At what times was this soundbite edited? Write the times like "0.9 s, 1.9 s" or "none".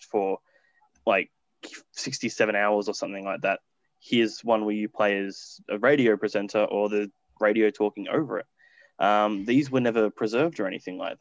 none